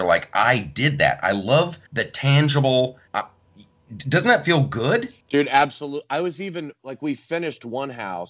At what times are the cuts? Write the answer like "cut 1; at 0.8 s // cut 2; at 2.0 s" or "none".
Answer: cut 1; at 1.9 s // cut 2; at 3.1 s // cut 3; at 5.2 s